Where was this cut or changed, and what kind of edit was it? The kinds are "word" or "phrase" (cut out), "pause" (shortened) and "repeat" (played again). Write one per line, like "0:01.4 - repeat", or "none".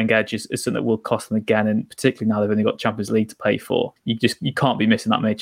0:04.0 - pause